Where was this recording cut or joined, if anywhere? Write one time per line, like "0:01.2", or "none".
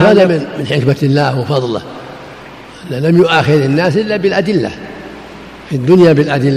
none